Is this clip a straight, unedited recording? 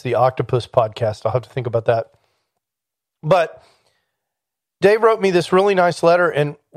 yes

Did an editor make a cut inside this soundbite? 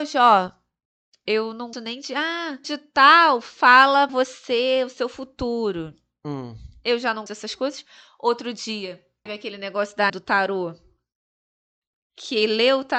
yes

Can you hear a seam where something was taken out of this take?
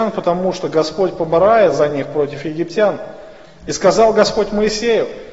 no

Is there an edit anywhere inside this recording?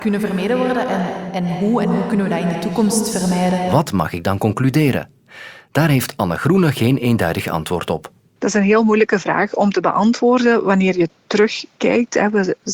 no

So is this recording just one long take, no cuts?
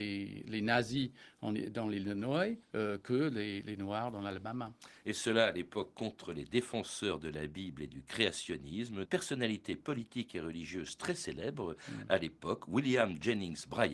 no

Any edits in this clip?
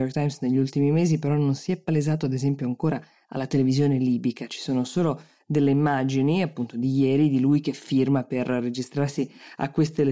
no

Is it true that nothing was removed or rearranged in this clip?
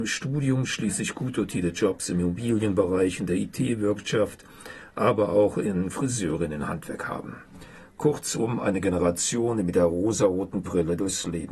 no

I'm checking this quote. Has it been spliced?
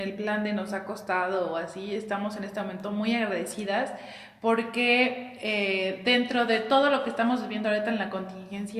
no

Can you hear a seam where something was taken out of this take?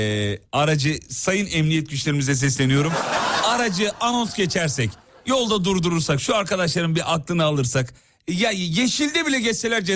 no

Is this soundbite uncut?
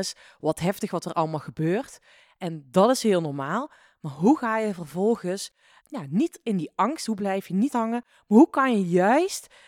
no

